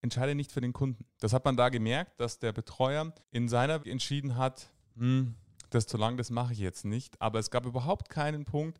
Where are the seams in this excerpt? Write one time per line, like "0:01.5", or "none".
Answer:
0:03.2
0:03.8
0:05.9